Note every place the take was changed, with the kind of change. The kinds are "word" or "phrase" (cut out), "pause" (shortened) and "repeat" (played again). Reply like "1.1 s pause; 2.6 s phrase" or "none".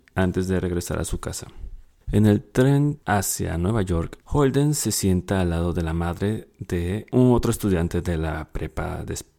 none